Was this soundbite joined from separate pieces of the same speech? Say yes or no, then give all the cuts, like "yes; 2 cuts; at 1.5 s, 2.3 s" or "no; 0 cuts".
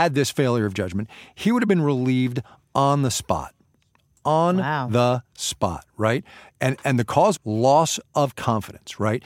yes; 1 cut; at 7.4 s